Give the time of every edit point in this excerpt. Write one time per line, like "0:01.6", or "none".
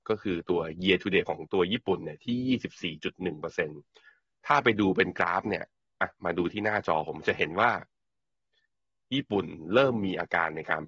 0:01.3